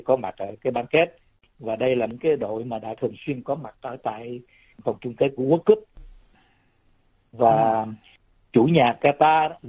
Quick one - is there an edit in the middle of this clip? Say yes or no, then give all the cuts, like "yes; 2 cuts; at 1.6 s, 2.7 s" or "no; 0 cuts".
no; 0 cuts